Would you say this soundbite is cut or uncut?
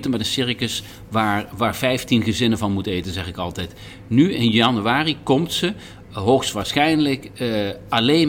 uncut